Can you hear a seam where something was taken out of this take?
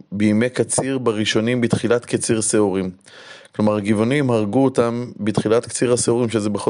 no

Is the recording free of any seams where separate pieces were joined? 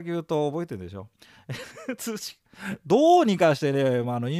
yes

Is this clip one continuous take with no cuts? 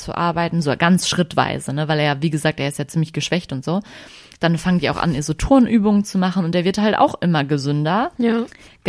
yes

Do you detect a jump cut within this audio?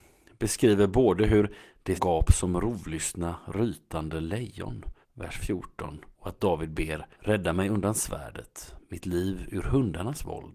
yes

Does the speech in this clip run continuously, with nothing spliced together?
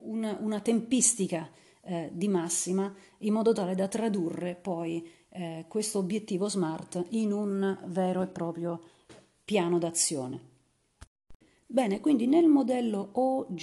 yes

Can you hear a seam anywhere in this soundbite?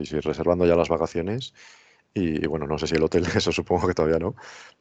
no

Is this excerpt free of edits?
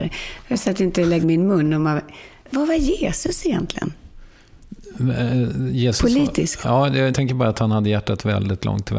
no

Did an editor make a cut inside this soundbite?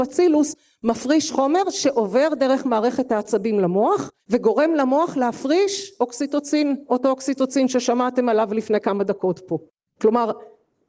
yes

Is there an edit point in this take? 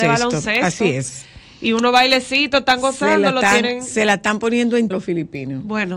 yes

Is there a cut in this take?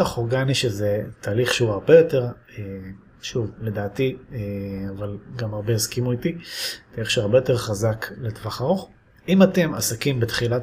no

